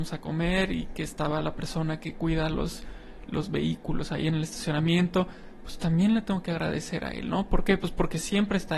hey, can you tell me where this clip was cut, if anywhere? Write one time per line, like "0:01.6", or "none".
none